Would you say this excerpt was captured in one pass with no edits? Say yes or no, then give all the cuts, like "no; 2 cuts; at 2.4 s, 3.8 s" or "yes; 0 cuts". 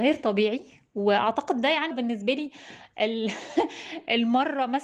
no; 1 cut; at 1.9 s